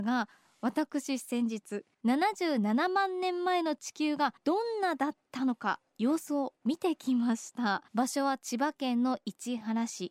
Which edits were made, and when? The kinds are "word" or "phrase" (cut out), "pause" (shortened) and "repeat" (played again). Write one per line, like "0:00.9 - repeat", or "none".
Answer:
0:01.9 - pause
0:04.4 - pause
0:07.9 - pause